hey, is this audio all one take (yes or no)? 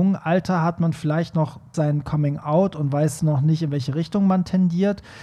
no